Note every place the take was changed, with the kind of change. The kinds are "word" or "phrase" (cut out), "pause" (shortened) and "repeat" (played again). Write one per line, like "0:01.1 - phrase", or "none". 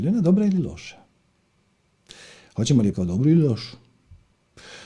0:02.9 - word